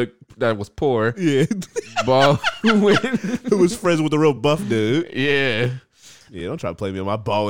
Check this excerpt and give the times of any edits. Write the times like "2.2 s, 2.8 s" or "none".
none